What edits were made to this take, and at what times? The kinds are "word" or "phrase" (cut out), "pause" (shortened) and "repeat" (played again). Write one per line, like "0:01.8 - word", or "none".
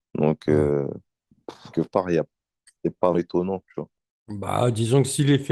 0:01.7 - word
0:03.1 - word